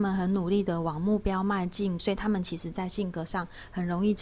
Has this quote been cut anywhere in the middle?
yes; 1 cut; at 2.0 s

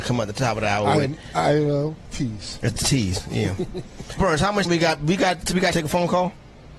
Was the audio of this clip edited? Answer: yes; 5 cuts; at 2.1 s, 4.2 s, 4.7 s, 5.4 s, 5.7 s

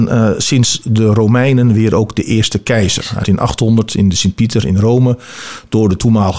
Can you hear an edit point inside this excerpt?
yes; 1 cut; at 3.2 s

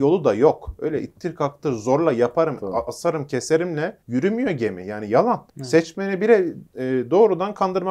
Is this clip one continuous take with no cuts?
no; 3 cuts; at 4.0 s, 5.5 s, 6.7 s

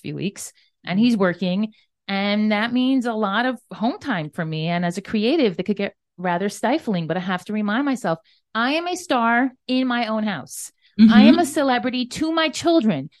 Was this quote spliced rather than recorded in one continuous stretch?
no; 0 cuts

